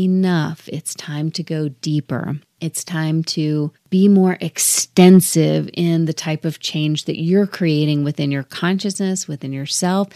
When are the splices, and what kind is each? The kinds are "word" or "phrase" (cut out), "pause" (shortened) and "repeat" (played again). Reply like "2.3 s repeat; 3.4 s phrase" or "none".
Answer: 2.5 s pause; 3.8 s pause